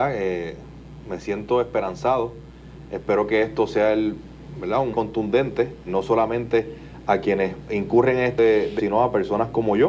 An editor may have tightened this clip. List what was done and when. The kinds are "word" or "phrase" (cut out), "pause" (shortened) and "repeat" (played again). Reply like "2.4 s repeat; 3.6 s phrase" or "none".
4.9 s word; 5.9 s word; 8.4 s word; 8.8 s word